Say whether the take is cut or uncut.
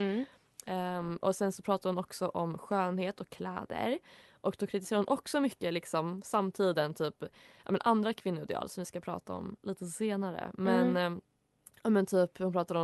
uncut